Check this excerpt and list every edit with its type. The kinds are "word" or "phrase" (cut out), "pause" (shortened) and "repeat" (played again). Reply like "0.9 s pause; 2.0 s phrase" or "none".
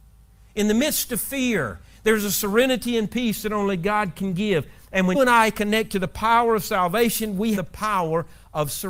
5.1 s word; 7.6 s word